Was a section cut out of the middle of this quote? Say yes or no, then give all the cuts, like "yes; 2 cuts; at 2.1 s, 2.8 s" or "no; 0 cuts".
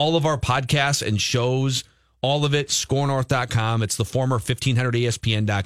no; 0 cuts